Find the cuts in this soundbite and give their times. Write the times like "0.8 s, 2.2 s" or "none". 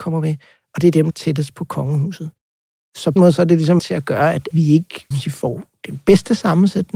1.1 s, 3.2 s, 3.8 s, 4.5 s, 5.1 s